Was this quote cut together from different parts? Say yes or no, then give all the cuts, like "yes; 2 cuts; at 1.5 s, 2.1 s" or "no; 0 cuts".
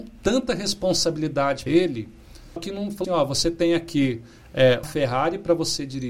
yes; 4 cuts; at 1.7 s, 2.6 s, 3.0 s, 4.8 s